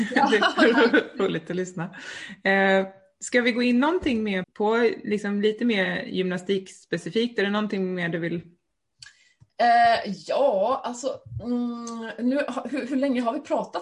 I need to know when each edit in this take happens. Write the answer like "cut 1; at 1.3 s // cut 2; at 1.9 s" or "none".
cut 1; at 4.4 s

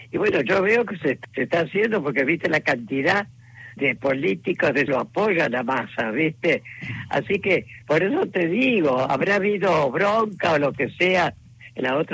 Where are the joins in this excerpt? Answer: cut 1; at 1.2 s // cut 2; at 3.8 s // cut 3; at 4.9 s // cut 4; at 7.8 s

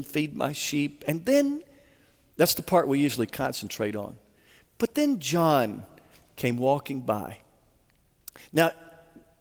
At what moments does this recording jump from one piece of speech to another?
none

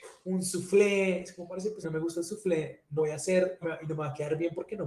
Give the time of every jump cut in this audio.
cut 1; at 1.8 s // cut 2; at 3.0 s // cut 3; at 3.6 s

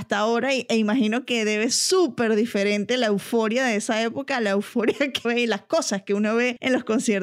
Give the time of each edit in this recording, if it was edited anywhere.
cut 1; at 1.7 s // cut 2; at 5.2 s

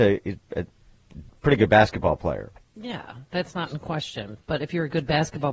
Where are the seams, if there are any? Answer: none

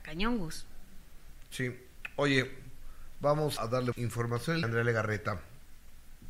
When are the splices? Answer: cut 1; at 3.6 s // cut 2; at 3.9 s // cut 3; at 4.6 s

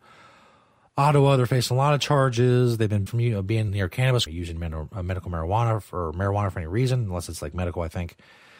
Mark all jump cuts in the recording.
cut 1; at 3.1 s // cut 2; at 3.7 s // cut 3; at 4.3 s

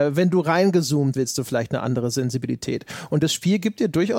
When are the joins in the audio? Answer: cut 1; at 1.1 s

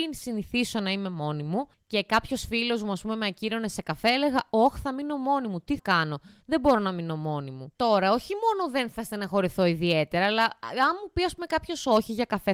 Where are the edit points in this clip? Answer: cut 1; at 5.8 s // cut 2; at 7.7 s

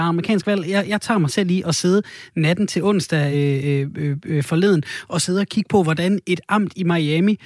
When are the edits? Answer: none

